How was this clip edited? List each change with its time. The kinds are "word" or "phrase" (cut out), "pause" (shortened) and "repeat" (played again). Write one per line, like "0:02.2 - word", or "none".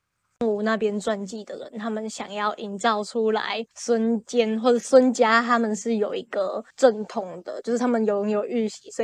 0:03.7 - pause
0:06.7 - pause